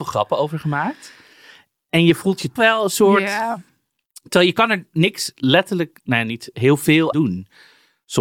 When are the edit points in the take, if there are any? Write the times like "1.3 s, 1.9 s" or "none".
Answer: 2.6 s, 7.1 s